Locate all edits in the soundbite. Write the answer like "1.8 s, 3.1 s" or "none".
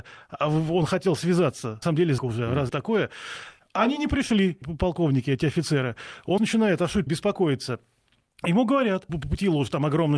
1.8 s, 2.2 s, 2.7 s, 4.6 s, 6.4 s, 7.1 s, 9.1 s